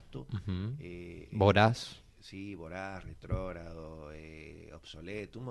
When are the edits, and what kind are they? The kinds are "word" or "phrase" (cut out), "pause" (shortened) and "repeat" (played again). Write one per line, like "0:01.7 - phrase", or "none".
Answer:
none